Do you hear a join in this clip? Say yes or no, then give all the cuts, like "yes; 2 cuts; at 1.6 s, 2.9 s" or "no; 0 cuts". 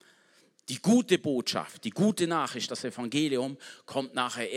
no; 0 cuts